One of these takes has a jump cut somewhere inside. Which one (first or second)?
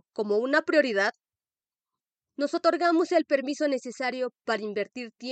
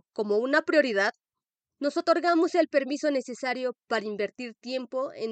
second